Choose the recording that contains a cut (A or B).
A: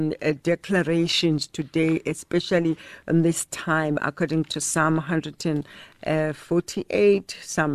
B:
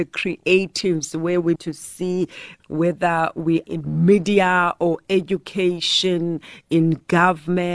B